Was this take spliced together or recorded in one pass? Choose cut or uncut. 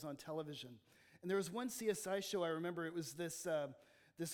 uncut